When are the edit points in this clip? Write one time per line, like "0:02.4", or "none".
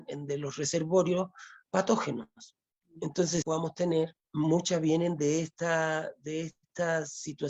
0:03.4
0:04.3